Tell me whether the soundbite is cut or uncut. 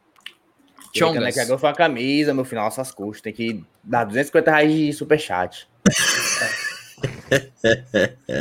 uncut